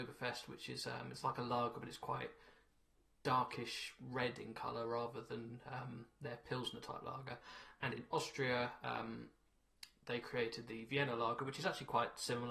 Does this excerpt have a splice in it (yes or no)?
no